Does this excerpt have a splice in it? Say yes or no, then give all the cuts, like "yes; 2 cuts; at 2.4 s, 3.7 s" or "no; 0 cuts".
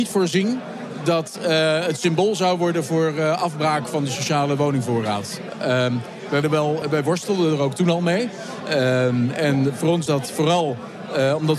yes; 3 cuts; at 6.4 s, 6.8 s, 10.1 s